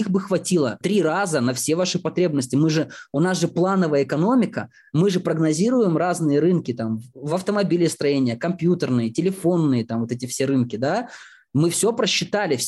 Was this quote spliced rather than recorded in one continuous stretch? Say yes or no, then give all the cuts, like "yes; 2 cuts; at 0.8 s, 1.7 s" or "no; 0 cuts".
no; 0 cuts